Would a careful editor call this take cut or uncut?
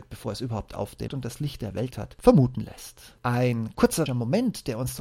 cut